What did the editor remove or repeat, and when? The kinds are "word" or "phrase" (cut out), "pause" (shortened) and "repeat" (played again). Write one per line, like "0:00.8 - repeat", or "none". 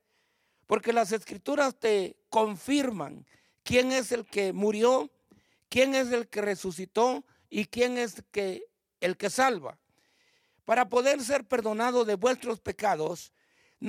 none